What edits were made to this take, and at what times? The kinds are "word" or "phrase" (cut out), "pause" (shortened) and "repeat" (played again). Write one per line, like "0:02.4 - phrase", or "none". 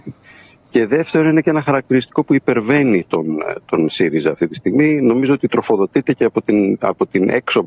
none